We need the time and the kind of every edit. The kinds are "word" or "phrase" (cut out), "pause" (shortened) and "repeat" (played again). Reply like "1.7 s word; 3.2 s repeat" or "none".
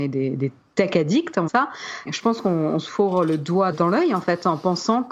1.5 s phrase; 2.1 s word; 3.7 s word